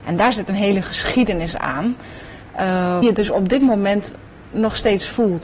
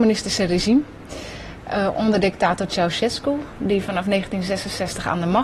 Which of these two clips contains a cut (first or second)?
first